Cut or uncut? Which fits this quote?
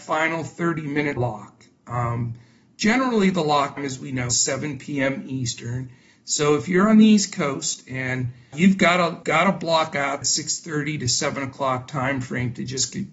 cut